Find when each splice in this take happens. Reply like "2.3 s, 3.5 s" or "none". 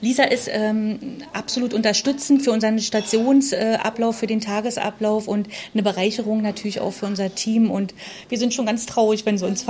none